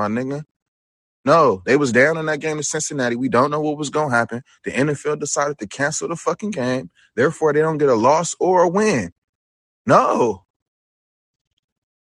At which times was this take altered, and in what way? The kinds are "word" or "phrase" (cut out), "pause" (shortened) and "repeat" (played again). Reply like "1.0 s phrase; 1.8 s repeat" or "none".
none